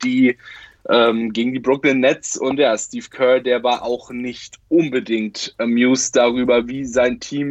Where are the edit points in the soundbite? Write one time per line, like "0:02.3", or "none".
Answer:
0:04.6